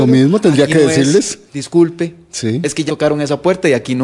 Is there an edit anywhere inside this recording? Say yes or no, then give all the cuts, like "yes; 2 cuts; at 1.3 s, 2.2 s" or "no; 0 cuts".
yes; 2 cuts; at 1.5 s, 2.9 s